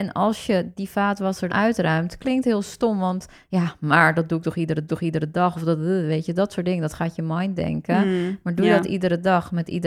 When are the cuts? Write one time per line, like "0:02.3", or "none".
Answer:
0:01.5
0:04.9